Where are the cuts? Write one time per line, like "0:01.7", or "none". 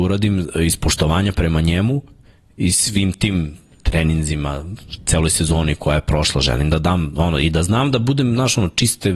none